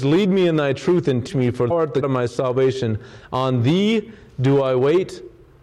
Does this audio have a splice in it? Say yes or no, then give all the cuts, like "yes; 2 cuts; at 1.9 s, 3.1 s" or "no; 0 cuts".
yes; 3 cuts; at 1.3 s, 1.7 s, 2.0 s